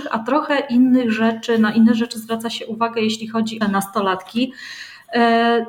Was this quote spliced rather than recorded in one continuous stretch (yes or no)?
yes